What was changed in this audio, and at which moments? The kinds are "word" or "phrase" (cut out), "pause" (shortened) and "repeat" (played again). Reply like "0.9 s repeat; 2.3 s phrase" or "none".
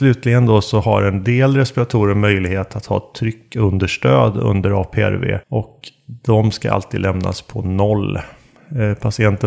5.4 s pause